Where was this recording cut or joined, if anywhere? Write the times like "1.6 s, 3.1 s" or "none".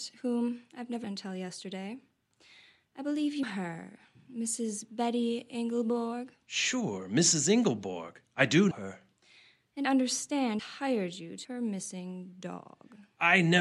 1.0 s, 3.4 s, 8.7 s, 9.8 s, 10.6 s, 11.4 s